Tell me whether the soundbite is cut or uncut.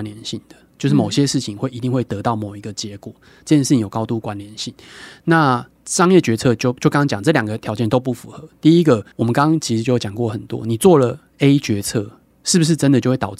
uncut